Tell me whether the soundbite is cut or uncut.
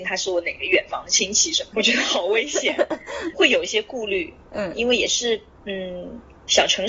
cut